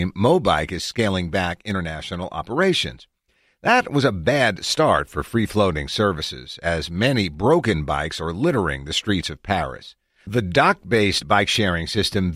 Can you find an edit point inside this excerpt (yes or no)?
no